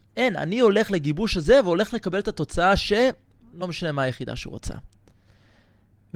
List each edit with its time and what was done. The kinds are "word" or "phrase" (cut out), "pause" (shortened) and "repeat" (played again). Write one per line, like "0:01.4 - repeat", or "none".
none